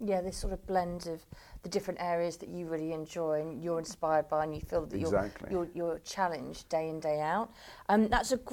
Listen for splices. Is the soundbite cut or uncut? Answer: uncut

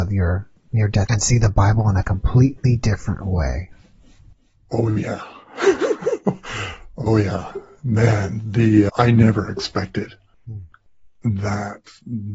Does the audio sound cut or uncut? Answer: cut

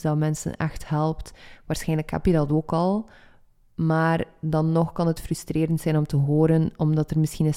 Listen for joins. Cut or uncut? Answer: uncut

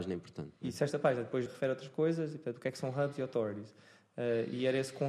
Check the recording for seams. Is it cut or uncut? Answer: cut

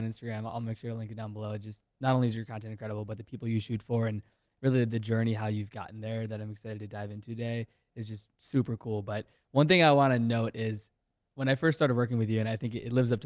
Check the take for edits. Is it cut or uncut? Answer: uncut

